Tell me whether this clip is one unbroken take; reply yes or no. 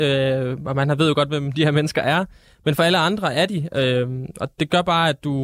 yes